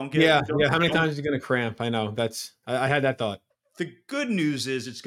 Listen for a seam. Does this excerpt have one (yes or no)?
yes